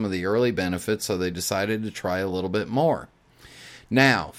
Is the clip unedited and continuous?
yes; 0 cuts

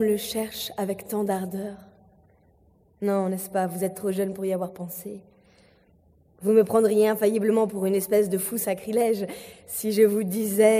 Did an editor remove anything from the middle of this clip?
no; 0 cuts

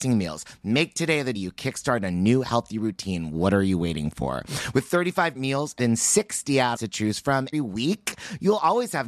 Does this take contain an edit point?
yes; 5 cuts; at 1.3 s, 5.3 s, 5.8 s, 6.7 s, 7.5 s

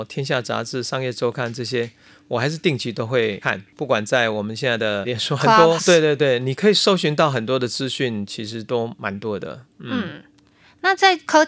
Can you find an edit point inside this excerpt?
yes; 1 cut; at 5.8 s

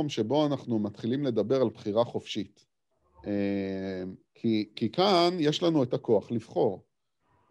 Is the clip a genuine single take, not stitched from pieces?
no; 1 cut; at 2.9 s

